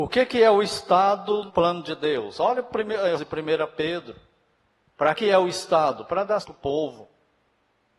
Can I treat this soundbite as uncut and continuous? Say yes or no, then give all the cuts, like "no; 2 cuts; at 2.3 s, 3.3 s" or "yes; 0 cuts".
no; 4 cuts; at 1.5 s, 3.2 s, 5.1 s, 6.4 s